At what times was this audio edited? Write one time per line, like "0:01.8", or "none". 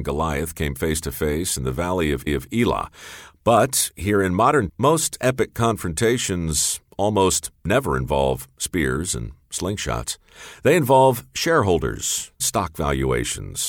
0:02.3
0:04.7
0:12.4